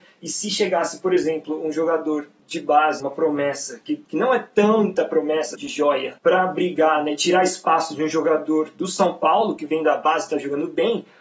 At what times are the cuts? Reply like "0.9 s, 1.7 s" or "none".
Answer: 3.0 s, 5.5 s, 6.2 s